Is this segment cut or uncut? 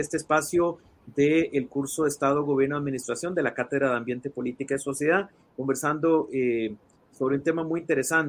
uncut